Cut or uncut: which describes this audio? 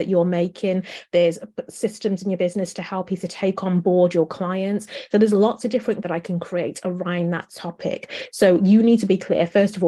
cut